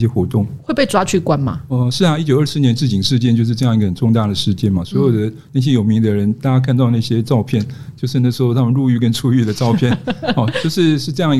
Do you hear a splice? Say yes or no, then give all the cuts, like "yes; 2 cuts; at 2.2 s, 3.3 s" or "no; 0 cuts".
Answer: no; 0 cuts